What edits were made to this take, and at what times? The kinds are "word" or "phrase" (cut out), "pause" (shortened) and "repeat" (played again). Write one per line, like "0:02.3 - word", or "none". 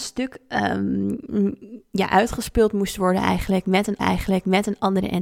0:04.0 - repeat